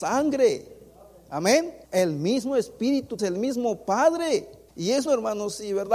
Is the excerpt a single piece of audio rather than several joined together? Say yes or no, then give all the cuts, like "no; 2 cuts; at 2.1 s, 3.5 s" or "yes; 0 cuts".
no; 4 cuts; at 1.8 s, 3.2 s, 4.7 s, 5.1 s